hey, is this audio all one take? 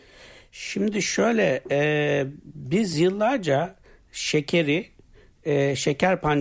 yes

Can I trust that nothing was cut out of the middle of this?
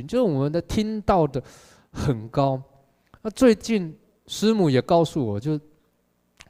yes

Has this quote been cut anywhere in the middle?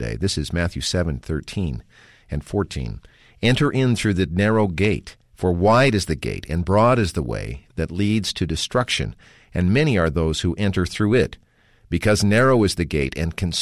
no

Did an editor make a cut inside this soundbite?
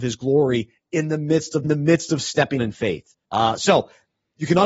yes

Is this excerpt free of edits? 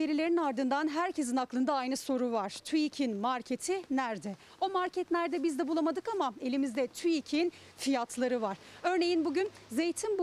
yes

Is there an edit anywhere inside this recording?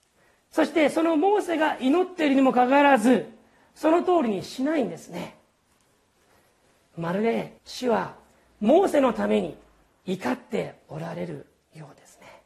yes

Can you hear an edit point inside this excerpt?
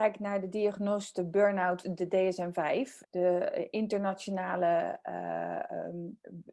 yes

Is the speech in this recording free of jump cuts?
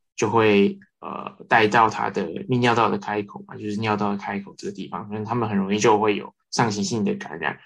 no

